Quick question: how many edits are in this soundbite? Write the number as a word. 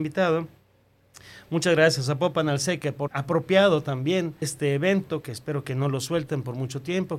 two